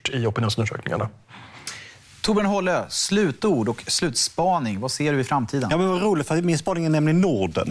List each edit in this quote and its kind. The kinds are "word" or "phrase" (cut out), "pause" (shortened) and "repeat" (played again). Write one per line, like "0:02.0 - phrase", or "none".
none